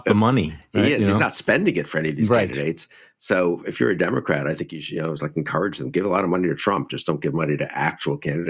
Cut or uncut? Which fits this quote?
uncut